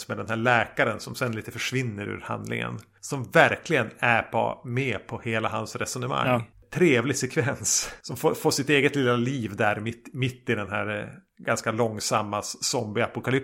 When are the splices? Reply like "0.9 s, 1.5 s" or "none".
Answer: none